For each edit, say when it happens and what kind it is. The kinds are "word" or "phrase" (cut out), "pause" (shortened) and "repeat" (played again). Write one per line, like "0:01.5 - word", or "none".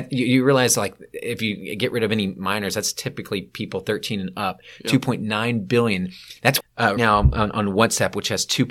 0:06.6 - phrase
0:07.0 - word